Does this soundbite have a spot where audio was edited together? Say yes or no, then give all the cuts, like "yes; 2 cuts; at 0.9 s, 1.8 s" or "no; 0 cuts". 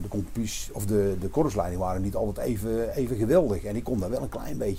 no; 0 cuts